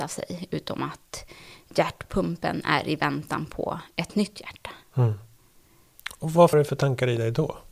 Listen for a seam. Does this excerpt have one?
yes; 1 cut; at 6.5 s

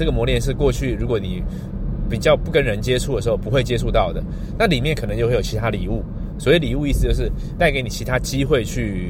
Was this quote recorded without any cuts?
no; 1 cut; at 7.6 s

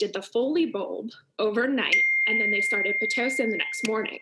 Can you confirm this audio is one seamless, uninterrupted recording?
yes; 0 cuts

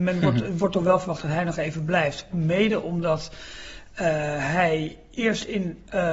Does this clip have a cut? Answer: no; 0 cuts

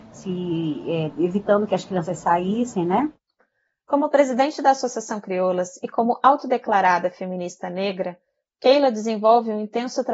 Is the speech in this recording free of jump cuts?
yes; 0 cuts

